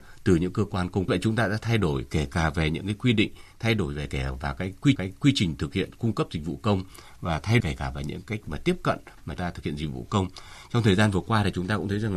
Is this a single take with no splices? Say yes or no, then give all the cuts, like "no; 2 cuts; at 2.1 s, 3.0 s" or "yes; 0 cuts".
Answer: no; 5 cuts; at 1.1 s, 5.0 s, 7.6 s, 8.4 s, 9.4 s